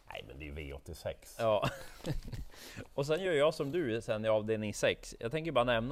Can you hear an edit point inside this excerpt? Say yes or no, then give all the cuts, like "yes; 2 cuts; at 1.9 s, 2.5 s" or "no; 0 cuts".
no; 0 cuts